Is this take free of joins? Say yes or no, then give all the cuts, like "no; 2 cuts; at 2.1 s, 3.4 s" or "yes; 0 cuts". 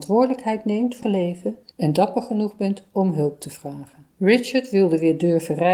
no; 2 cuts; at 1.0 s, 4.1 s